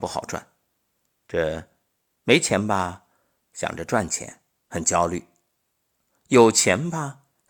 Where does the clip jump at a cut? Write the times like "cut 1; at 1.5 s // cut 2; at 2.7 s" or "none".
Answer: none